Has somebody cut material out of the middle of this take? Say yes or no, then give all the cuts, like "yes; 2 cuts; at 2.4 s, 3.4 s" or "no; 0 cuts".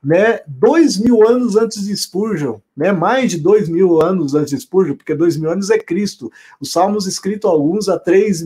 no; 0 cuts